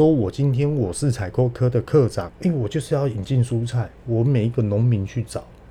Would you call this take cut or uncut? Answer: cut